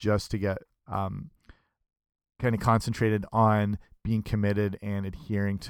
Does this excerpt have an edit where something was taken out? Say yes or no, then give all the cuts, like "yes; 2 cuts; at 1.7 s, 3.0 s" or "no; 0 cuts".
no; 0 cuts